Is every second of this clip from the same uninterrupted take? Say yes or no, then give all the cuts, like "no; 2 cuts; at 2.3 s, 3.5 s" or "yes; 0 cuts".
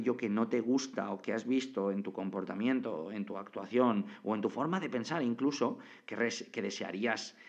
yes; 0 cuts